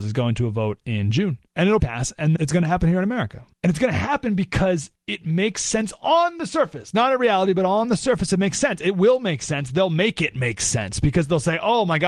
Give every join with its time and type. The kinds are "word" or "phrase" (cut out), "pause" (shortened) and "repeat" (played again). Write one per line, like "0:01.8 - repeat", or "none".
0:01.5 - pause
0:01.8 - word
0:02.4 - word
0:03.5 - pause
0:04.9 - pause